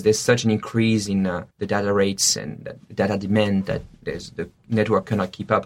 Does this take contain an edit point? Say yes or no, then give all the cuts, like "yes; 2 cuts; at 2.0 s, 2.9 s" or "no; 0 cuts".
yes; 1 cut; at 1.5 s